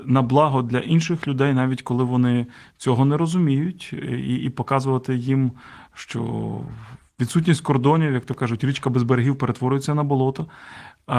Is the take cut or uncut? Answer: uncut